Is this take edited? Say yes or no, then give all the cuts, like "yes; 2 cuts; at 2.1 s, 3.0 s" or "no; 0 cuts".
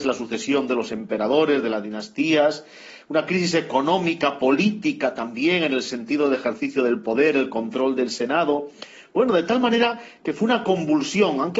no; 0 cuts